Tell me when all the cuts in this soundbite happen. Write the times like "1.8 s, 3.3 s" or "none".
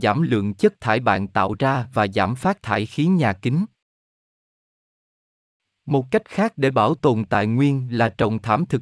none